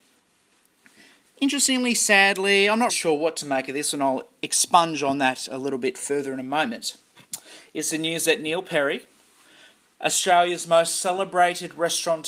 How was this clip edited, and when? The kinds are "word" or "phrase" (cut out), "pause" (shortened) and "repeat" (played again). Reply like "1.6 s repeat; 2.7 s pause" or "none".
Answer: 2.9 s word